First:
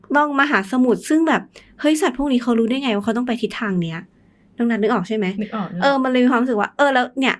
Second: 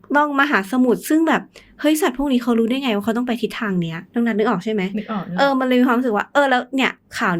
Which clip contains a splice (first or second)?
second